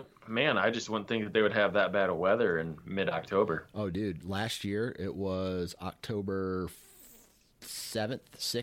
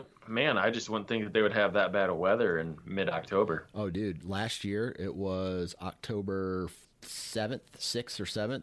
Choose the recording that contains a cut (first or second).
second